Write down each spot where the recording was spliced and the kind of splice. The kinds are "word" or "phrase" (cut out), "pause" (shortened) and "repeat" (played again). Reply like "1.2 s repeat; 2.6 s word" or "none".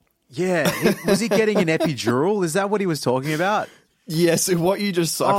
3.9 s pause